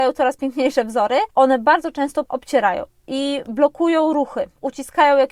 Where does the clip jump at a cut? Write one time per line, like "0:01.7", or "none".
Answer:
0:01.3
0:02.2